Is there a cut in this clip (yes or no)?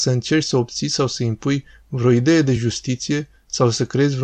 no